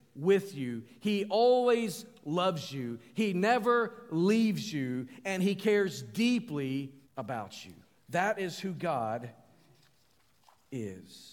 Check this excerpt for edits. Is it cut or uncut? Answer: cut